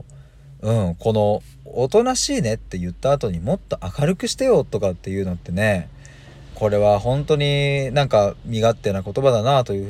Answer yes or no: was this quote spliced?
yes